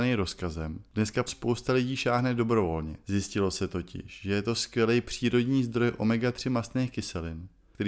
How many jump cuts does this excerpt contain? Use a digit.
2